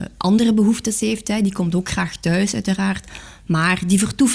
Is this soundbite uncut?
yes; 0 cuts

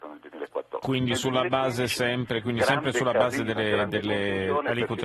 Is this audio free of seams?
yes; 0 cuts

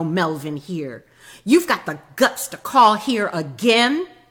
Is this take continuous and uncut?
yes; 0 cuts

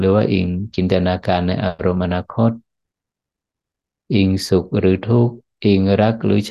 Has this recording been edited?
no; 0 cuts

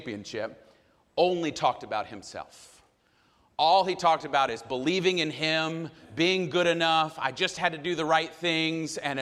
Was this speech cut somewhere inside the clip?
no; 0 cuts

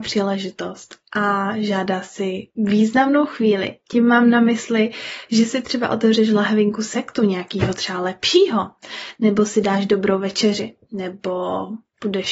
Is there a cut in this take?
no; 0 cuts

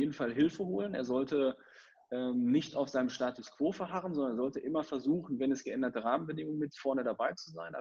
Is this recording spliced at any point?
no; 0 cuts

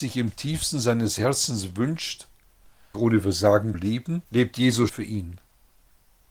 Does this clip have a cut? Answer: yes; 4 cuts; at 2.9 s, 3.7 s, 4.3 s, 4.9 s

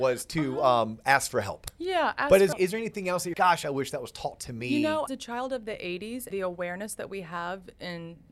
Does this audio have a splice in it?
yes; 4 cuts; at 2.5 s, 3.3 s, 5.1 s, 6.3 s

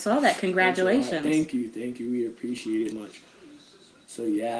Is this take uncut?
no; 1 cut; at 2.9 s

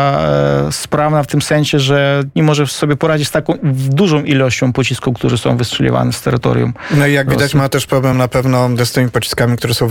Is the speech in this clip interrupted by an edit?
no; 0 cuts

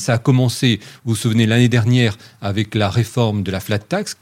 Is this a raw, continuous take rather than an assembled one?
yes; 0 cuts

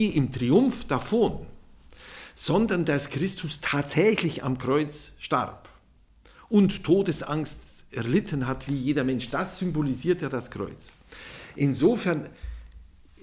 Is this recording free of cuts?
yes; 0 cuts

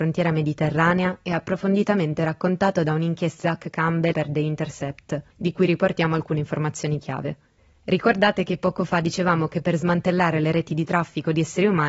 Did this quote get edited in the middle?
yes; 4 cuts; at 3.4 s, 4.1 s, 5.3 s, 7.6 s

